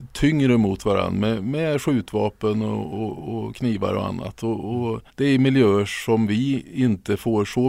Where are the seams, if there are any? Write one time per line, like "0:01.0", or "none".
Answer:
0:05.1